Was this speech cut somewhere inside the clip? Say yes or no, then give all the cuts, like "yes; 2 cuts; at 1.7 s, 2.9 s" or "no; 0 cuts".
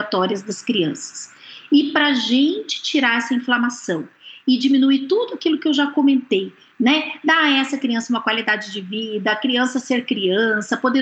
no; 0 cuts